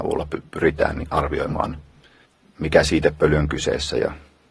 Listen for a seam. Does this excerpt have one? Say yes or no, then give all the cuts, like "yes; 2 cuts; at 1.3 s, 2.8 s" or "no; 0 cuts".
yes; 1 cut; at 2.2 s